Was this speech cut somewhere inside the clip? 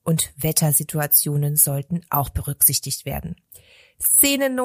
no; 0 cuts

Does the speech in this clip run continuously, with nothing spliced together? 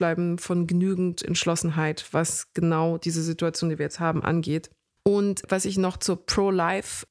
yes; 0 cuts

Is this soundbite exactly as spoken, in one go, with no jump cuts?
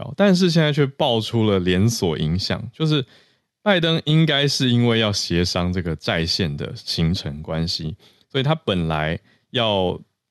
yes; 0 cuts

